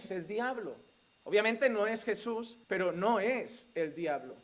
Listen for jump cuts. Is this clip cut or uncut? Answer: cut